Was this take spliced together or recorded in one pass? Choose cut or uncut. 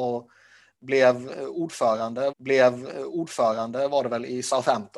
cut